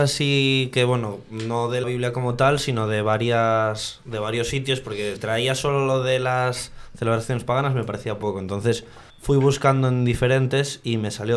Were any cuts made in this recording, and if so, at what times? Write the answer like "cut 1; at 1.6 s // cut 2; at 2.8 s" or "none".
cut 1; at 1.8 s // cut 2; at 5.2 s // cut 3; at 9.1 s

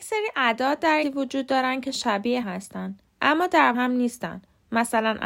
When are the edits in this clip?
cut 1; at 1.0 s // cut 2; at 2.4 s // cut 3; at 3.7 s

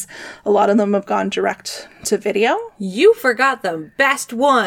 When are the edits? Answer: none

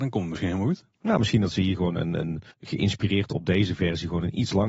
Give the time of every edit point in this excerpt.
cut 1; at 2.5 s

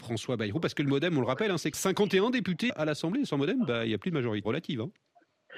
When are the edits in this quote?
cut 1; at 1.7 s // cut 2; at 2.7 s // cut 3; at 4.4 s

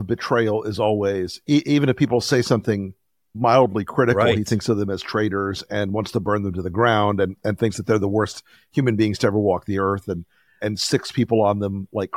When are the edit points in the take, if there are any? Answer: none

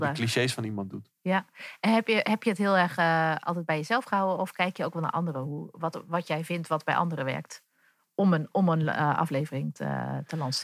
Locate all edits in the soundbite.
none

